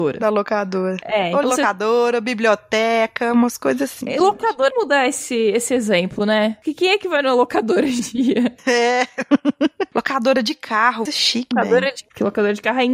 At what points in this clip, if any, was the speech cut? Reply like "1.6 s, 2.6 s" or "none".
1.4 s, 4.7 s, 8.0 s, 11.1 s, 11.5 s